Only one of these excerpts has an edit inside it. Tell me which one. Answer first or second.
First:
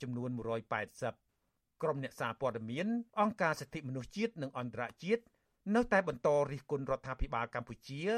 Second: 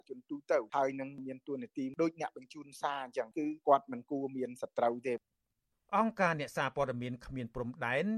first